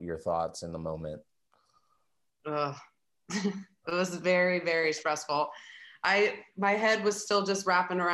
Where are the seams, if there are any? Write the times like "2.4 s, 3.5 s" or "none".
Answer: 1.3 s

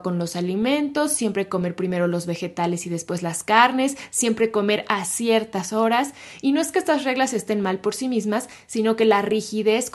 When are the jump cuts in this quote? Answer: none

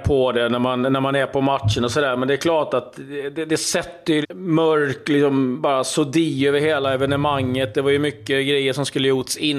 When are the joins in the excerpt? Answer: 4.2 s

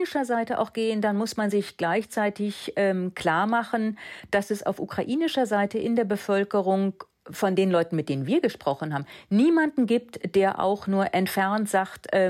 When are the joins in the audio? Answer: none

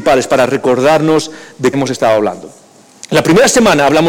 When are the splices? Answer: 1.7 s

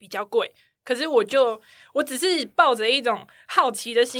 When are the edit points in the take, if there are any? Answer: none

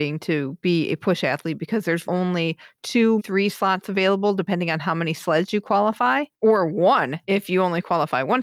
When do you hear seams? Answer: 2.0 s, 3.2 s, 6.3 s, 7.2 s

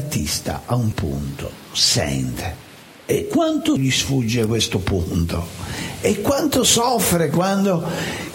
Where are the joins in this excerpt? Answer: 0.9 s, 2.9 s, 3.8 s

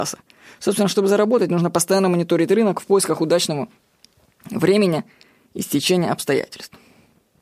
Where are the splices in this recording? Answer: none

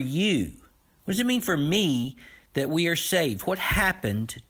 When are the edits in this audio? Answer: none

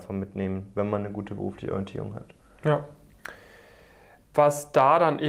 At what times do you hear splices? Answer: none

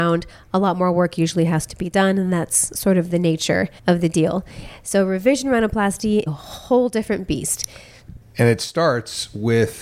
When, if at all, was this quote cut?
3.8 s, 6.3 s

